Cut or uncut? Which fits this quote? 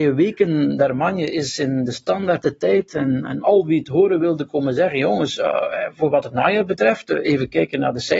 uncut